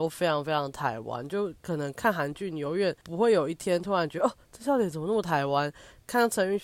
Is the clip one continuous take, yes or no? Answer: yes